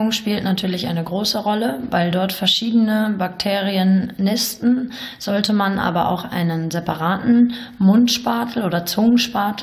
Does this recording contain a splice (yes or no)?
no